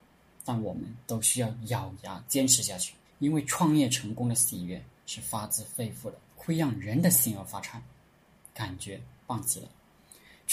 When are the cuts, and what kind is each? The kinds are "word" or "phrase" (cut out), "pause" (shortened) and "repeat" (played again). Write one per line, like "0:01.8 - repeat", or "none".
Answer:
0:03.0 - pause
0:06.3 - pause